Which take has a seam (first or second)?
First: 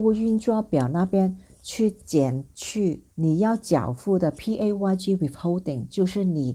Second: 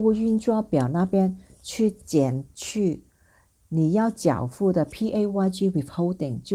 first